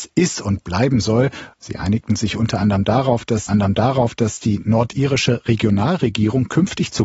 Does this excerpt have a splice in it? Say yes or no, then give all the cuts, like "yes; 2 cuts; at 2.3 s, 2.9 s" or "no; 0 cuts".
yes; 2 cuts; at 1.5 s, 3.5 s